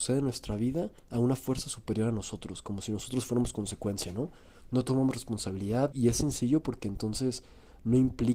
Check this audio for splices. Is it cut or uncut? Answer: cut